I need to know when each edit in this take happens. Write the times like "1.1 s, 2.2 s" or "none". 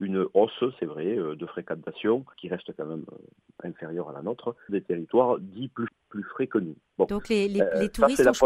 2.3 s, 4.7 s, 5.9 s